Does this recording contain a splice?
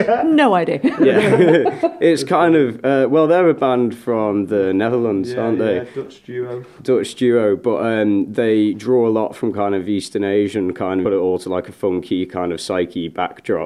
yes; 1 cut; at 11.0 s

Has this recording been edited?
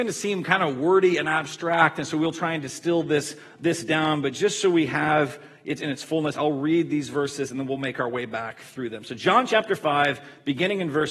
no; 0 cuts

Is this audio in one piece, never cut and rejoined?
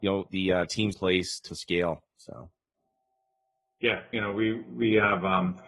no; 3 cuts; at 0.9 s, 1.5 s, 4.1 s

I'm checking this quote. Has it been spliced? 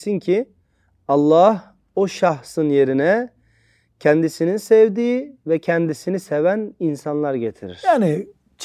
no; 0 cuts

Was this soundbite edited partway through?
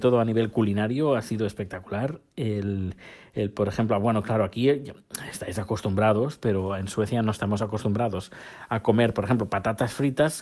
no; 0 cuts

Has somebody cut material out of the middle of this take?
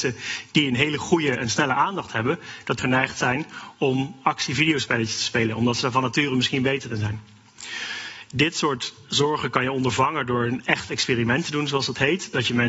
yes; 1 cut; at 2.8 s

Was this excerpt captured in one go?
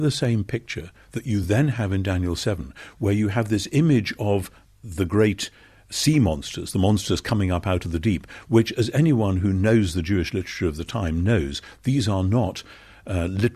yes; 0 cuts

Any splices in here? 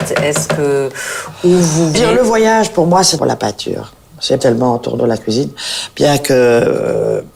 yes; 4 cuts; at 1.9 s, 3.2 s, 4.4 s, 5.0 s

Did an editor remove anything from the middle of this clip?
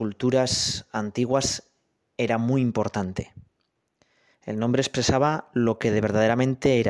no; 0 cuts

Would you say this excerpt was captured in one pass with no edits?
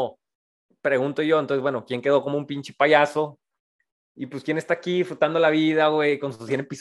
yes; 0 cuts

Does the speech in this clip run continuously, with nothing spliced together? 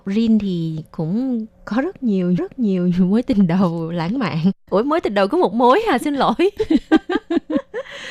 no; 1 cut; at 2.4 s

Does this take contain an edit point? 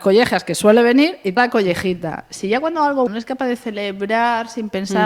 yes; 2 cuts; at 1.4 s, 3.1 s

